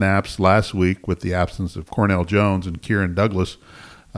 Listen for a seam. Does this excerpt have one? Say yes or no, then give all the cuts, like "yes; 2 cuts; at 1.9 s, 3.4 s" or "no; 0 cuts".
no; 0 cuts